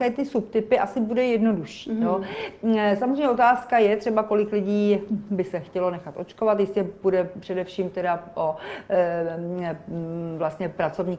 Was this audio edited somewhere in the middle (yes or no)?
no